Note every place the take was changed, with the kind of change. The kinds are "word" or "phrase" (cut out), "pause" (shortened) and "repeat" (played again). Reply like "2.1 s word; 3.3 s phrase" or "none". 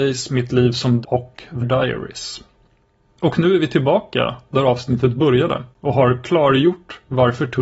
1.0 s word; 1.6 s word; 5.7 s pause

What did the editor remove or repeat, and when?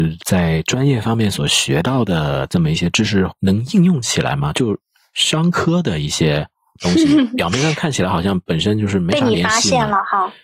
none

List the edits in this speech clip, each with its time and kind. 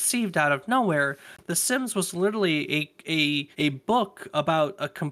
3.5 s pause

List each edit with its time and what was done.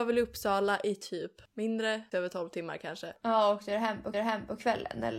2.1 s phrase; 4.1 s repeat

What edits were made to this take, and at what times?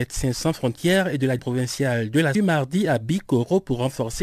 1.4 s word; 2.3 s phrase

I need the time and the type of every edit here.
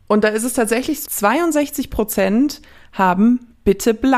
1.0 s word

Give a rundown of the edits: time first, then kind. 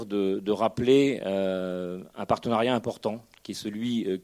none

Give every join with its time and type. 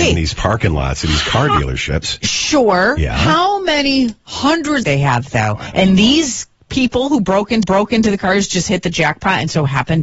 4.8 s phrase; 7.6 s repeat

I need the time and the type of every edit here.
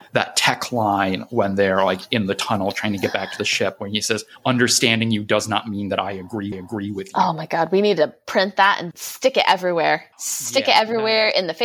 6.5 s repeat; 8.9 s word; 10.1 s pause

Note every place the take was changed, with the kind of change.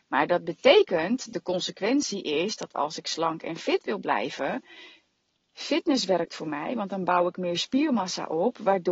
none

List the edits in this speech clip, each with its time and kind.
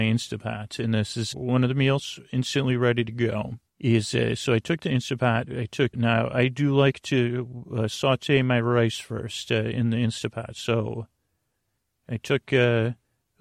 1.3 s word; 3.7 s pause; 5.9 s word

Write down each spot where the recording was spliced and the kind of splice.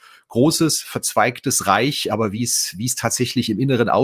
none

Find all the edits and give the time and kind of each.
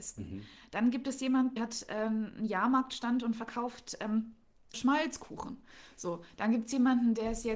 1.6 s word; 4.7 s word

